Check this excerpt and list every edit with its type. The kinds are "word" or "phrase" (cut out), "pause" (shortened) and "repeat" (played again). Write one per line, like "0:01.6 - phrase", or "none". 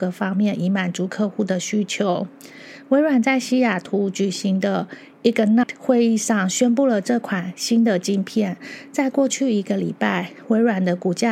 0:05.6 - word